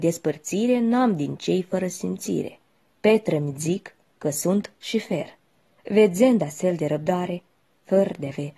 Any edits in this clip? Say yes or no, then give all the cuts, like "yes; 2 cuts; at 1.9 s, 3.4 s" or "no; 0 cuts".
no; 0 cuts